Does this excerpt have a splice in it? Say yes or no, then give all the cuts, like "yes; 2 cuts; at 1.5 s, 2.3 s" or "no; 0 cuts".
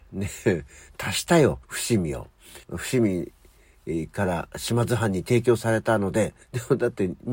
yes; 3 cuts; at 1.6 s, 2.6 s, 6.4 s